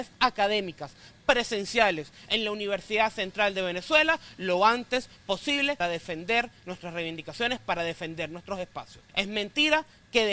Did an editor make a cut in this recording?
yes; 2 cuts; at 5.8 s, 9.1 s

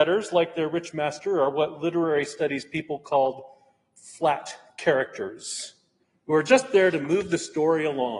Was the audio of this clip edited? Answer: yes; 1 cut; at 6.0 s

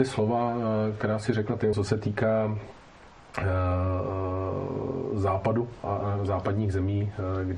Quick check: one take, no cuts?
no; 2 cuts; at 1.7 s, 5.8 s

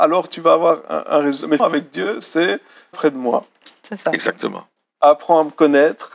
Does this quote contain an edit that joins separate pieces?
yes; 2 cuts; at 1.6 s, 2.9 s

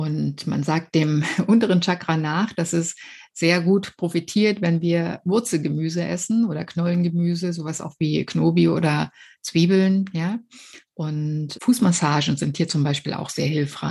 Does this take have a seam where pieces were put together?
yes; 1 cut; at 11.5 s

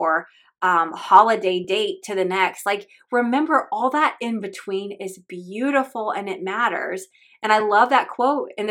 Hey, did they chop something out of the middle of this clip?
no; 0 cuts

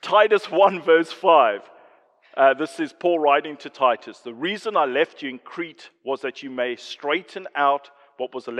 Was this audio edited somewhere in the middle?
no; 0 cuts

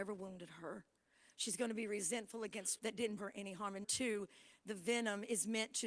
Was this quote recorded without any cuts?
no; 3 cuts; at 2.8 s, 3.2 s, 3.8 s

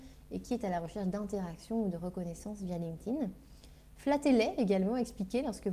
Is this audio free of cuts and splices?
yes; 0 cuts

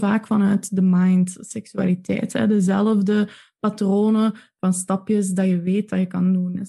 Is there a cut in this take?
no; 0 cuts

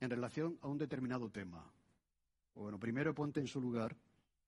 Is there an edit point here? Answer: no; 0 cuts

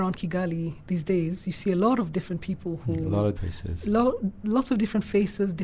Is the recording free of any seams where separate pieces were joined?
no; 1 cut; at 3.4 s

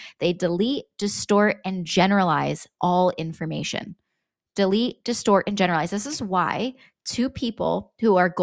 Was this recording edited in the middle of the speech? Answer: no; 0 cuts

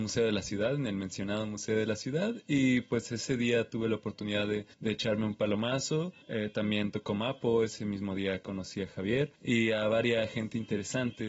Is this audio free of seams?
no; 3 cuts; at 4.7 s, 6.2 s, 9.4 s

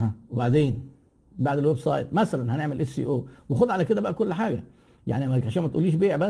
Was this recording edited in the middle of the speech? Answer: no; 0 cuts

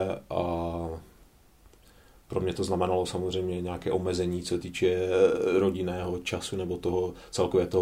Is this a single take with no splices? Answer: yes; 0 cuts

